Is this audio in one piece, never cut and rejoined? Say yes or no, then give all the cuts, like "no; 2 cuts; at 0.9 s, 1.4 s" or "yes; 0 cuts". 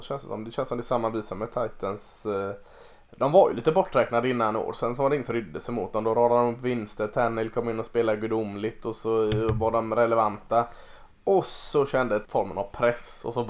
no; 2 cuts; at 5.3 s, 12.2 s